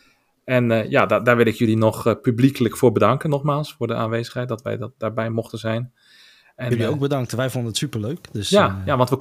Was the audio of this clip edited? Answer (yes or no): no